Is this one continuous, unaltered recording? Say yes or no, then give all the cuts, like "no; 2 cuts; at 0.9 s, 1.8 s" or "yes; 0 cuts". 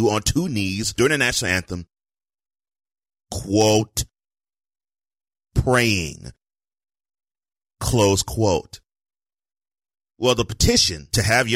yes; 0 cuts